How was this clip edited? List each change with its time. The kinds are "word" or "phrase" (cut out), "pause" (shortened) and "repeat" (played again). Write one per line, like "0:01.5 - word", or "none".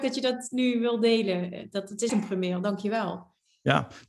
0:02.1 - word